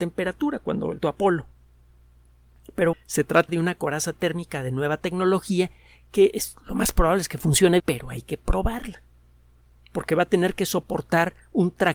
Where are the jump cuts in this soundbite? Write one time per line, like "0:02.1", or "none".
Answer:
0:01.0
0:02.9
0:03.5
0:07.8